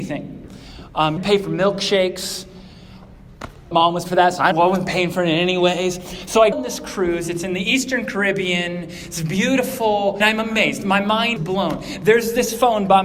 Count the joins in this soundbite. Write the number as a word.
seven